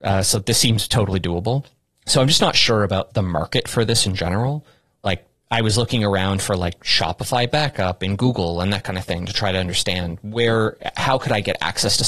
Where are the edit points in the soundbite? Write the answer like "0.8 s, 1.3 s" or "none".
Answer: 3.1 s